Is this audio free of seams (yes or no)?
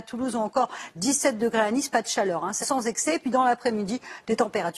no